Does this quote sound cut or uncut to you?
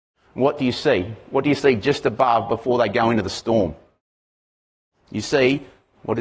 uncut